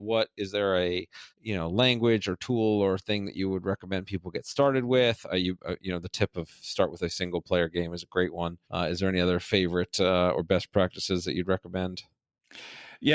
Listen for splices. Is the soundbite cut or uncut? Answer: cut